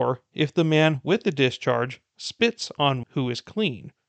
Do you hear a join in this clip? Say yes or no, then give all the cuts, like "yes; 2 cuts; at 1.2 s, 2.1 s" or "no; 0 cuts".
yes; 1 cut; at 3.0 s